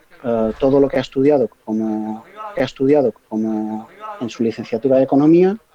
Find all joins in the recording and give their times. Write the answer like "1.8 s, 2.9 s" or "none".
2.5 s